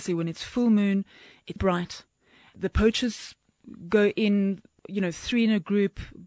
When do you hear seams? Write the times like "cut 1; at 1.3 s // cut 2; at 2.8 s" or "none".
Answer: cut 1; at 1.6 s